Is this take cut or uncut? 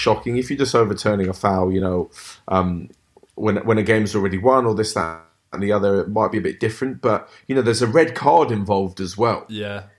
uncut